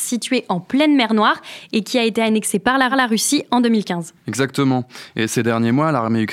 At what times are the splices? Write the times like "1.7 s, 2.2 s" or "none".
2.9 s